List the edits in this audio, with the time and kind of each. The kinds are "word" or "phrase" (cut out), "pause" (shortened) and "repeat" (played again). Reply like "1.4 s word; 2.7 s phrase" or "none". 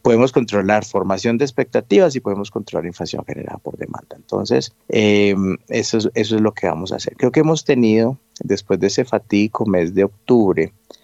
4.8 s pause